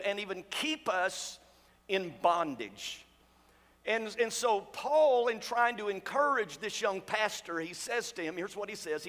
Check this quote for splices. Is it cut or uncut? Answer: uncut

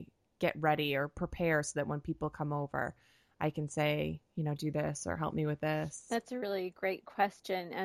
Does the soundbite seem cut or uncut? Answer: uncut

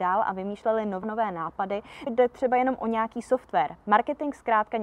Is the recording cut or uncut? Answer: cut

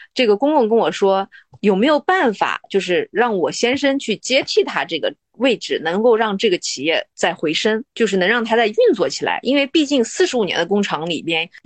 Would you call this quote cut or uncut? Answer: uncut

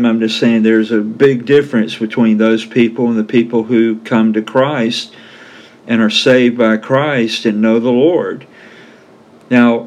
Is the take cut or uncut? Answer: uncut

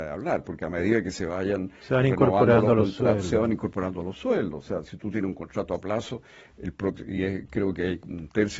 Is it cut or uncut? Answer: uncut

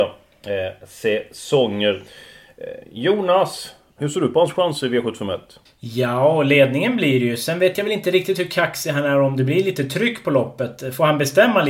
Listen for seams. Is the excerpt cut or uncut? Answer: cut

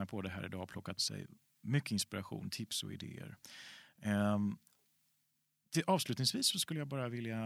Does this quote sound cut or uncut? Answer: cut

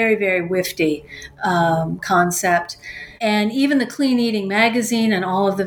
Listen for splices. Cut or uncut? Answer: cut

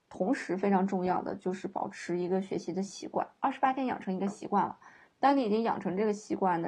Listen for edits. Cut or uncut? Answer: uncut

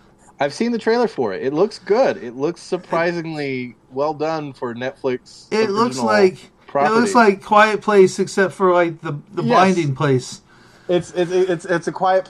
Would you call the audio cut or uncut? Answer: cut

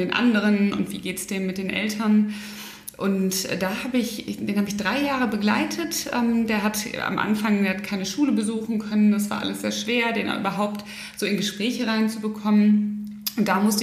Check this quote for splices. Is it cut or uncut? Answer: uncut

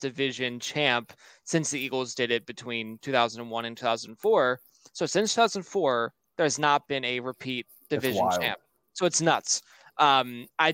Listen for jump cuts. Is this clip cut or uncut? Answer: uncut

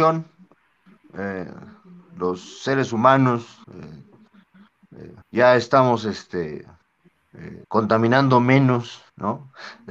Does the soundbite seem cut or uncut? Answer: cut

